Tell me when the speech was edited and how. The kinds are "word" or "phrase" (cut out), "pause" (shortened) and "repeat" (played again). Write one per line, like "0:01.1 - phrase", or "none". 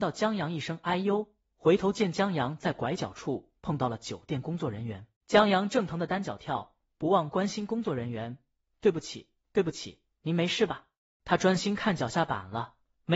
0:05.2 - pause
0:10.1 - pause
0:11.0 - pause